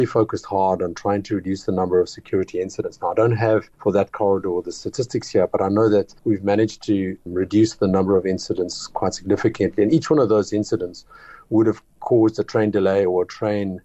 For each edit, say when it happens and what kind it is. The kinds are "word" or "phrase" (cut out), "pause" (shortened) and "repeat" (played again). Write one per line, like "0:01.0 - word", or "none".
0:03.7 - pause
0:06.2 - pause